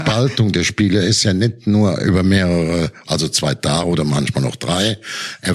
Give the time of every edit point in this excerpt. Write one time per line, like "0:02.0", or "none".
none